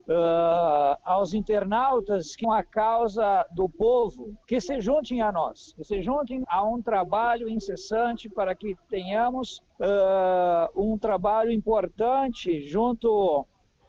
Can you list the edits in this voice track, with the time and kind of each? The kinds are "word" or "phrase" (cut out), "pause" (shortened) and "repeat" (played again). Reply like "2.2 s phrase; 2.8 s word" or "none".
2.4 s word; 4.4 s pause; 6.4 s word; 9.7 s pause